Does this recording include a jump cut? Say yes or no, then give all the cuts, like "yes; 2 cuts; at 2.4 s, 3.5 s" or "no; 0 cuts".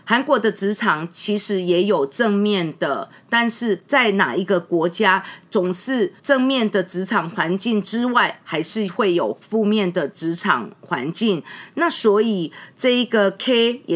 yes; 1 cut; at 6.2 s